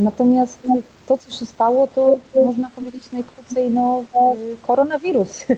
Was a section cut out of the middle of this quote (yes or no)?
no